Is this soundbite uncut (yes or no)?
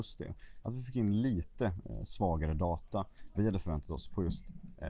no